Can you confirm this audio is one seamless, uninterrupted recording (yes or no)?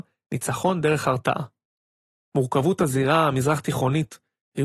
yes